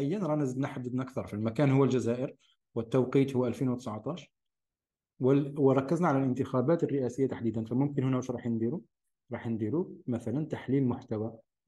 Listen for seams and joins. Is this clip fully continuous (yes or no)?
yes